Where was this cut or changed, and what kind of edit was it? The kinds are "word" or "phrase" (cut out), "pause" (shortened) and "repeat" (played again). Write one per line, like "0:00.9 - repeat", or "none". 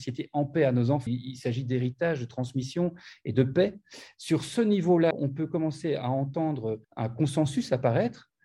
0:01.1 - word
0:05.1 - word
0:06.8 - pause